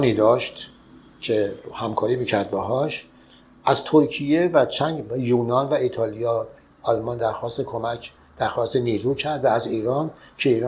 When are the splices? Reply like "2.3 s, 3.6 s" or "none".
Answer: none

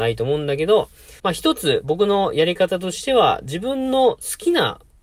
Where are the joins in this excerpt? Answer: 1.2 s

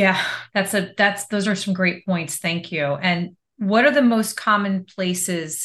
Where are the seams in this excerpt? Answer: none

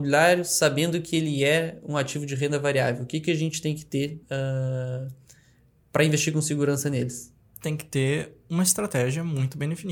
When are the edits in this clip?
4.2 s

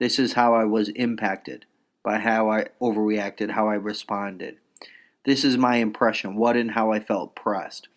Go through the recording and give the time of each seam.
none

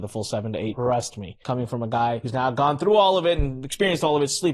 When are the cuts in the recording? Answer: none

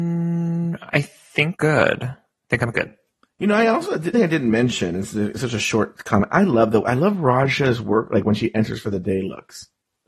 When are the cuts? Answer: 1.5 s, 4.1 s

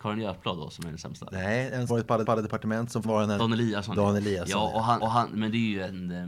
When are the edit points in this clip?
1.9 s, 2.2 s, 3.0 s, 3.4 s, 5.0 s

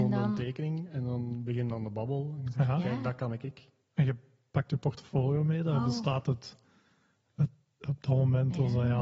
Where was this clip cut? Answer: none

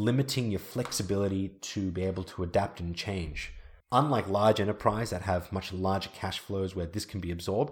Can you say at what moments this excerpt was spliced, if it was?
3.8 s

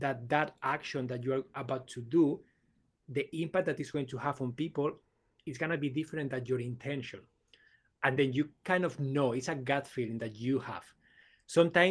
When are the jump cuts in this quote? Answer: none

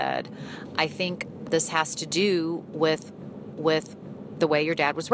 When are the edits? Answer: 1.4 s, 3.5 s

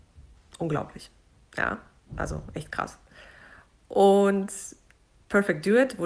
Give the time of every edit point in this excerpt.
none

